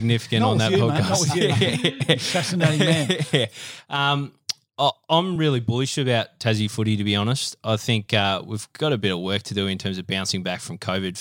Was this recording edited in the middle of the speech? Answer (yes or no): no